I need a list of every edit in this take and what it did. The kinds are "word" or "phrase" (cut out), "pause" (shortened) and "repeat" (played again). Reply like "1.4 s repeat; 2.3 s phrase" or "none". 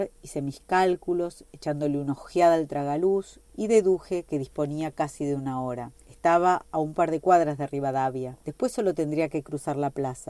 5.9 s pause; 8.4 s pause